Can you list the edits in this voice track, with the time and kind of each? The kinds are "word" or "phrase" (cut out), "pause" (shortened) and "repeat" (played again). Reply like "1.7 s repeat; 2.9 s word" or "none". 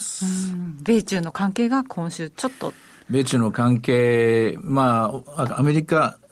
none